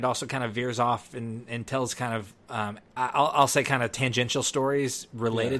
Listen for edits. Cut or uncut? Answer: cut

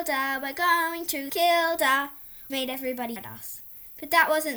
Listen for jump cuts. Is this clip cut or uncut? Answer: cut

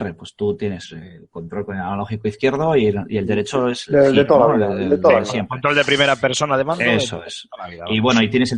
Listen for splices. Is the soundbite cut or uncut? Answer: uncut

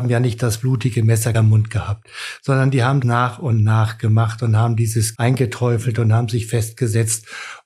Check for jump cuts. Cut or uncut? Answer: cut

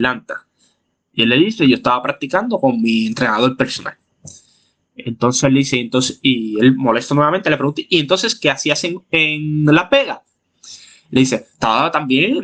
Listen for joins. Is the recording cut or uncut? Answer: uncut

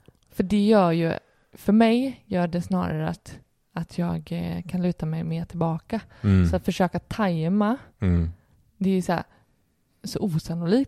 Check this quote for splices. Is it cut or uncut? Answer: uncut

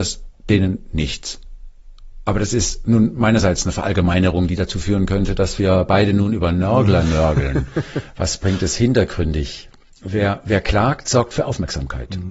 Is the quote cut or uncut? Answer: uncut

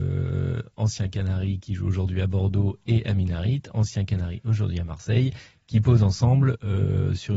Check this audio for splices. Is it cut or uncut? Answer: uncut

